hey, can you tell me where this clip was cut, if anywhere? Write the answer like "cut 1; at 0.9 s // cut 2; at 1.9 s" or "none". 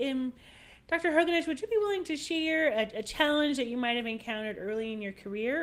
none